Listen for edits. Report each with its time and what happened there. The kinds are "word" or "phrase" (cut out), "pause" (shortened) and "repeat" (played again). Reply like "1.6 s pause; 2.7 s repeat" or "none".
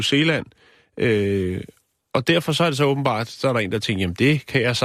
none